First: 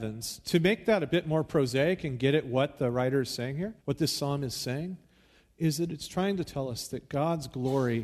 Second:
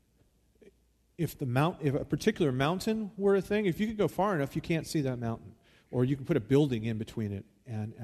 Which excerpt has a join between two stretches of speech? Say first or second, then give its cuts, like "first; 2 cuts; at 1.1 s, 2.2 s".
first; 1 cut; at 3.8 s